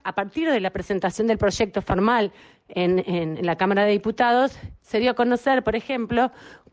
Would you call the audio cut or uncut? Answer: uncut